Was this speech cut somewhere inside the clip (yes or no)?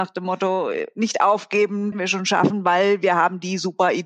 yes